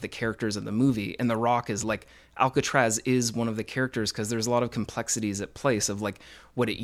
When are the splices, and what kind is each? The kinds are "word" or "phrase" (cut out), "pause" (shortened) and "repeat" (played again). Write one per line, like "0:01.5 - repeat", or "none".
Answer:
0:01.8 - word